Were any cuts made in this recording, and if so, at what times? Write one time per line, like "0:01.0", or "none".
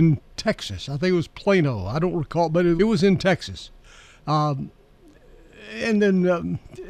0:02.8